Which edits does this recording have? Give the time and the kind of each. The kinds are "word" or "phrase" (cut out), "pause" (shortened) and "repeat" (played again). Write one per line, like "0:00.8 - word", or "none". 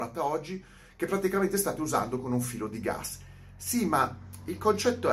none